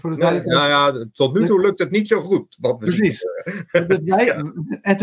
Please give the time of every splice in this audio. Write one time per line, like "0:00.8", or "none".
none